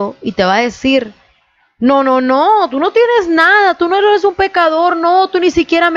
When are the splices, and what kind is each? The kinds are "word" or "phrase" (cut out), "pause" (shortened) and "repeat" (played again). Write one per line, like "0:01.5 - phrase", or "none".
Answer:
none

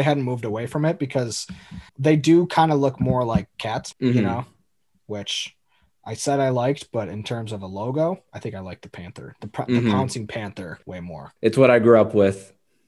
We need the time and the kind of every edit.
0:01.9 - pause
0:03.9 - word
0:10.8 - pause
0:11.4 - pause

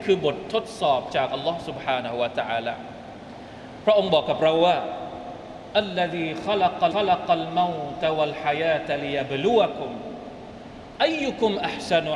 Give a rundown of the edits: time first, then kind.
0:06.9 - repeat

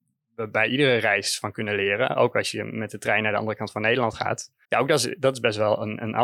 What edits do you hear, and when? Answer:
0:04.6 - pause

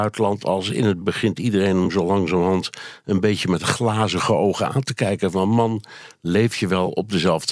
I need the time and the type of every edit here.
0:01.0 - word

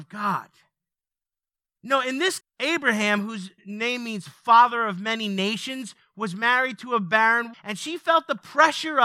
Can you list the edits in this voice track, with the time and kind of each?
0:02.4 - word
0:03.6 - pause
0:07.5 - word

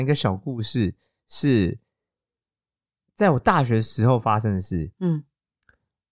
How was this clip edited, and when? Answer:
none

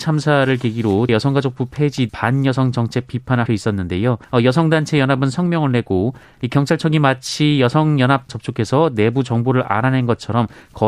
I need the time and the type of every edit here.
0:01.1 - word
0:02.1 - word
0:03.5 - phrase
0:04.2 - pause
0:08.3 - word

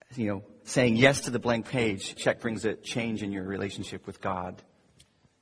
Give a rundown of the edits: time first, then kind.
0:02.2 - word

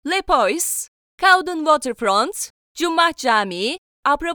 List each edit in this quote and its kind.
none

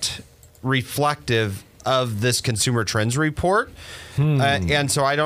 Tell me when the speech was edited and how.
none

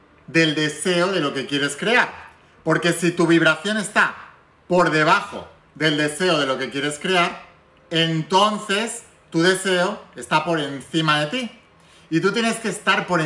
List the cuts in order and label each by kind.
none

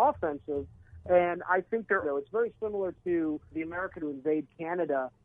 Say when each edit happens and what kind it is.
0:02.0 - word
0:03.5 - word
0:04.0 - phrase

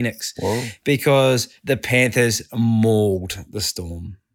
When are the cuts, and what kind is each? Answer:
0:01.6 - pause

